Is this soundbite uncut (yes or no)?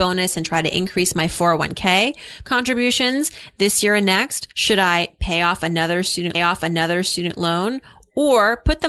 no